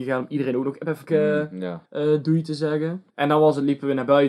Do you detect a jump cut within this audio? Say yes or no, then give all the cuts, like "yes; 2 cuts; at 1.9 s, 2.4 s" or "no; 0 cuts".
yes; 3 cuts; at 1.1 s, 1.9 s, 3.1 s